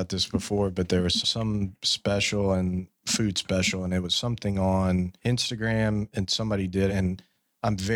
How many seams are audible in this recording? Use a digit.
4